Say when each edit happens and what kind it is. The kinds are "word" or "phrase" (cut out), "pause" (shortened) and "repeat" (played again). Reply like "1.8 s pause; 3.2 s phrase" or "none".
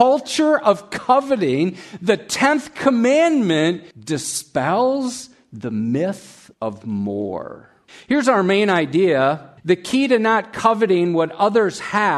3.9 s pause; 6.5 s pause; 7.9 s pause; 9.6 s pause